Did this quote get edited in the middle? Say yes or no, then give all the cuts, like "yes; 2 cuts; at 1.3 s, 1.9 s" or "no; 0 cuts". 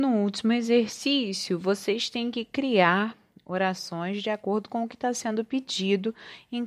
no; 0 cuts